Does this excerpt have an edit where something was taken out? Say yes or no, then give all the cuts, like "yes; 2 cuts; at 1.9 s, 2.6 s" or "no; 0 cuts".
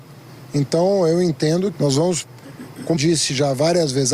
yes; 2 cuts; at 1.7 s, 3.0 s